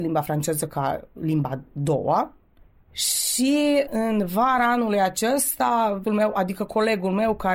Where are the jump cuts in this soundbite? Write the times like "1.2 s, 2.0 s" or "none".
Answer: 3.9 s, 6.1 s